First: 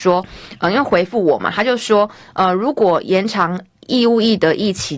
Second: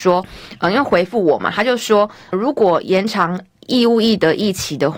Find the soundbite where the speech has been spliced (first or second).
second